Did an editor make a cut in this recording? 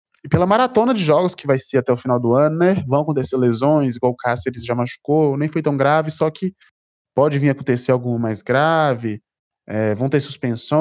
no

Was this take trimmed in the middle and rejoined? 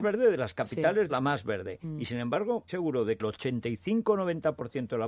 yes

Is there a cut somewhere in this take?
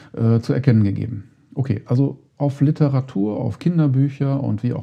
no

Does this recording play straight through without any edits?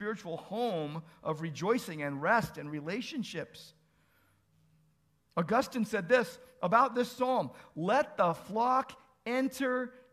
yes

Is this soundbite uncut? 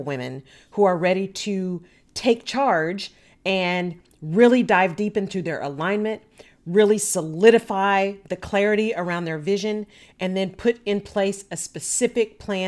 yes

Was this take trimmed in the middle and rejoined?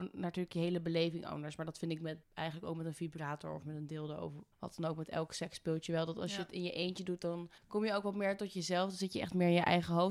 yes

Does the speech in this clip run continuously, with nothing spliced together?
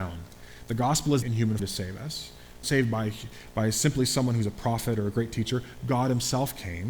no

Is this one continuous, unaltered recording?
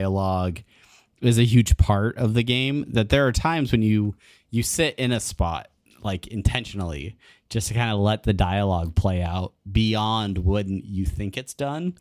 yes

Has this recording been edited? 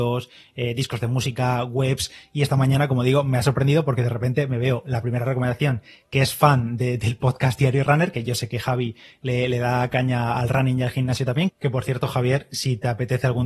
no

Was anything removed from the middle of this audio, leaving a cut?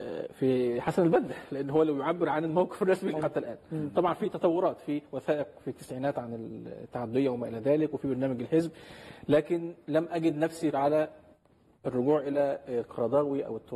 yes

